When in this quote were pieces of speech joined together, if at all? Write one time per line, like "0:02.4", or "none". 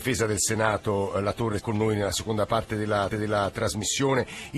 0:01.6
0:03.1